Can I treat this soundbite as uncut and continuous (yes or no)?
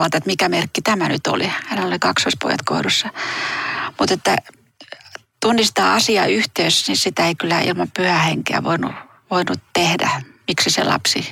yes